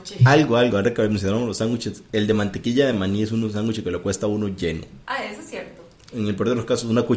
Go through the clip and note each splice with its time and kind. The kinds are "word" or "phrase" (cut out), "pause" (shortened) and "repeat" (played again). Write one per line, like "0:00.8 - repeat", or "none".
none